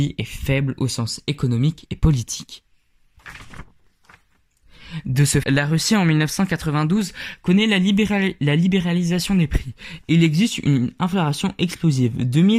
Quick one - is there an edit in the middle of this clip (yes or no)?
yes